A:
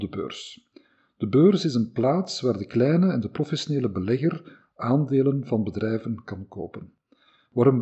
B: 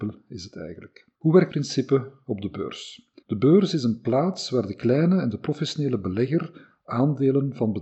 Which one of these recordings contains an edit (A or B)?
B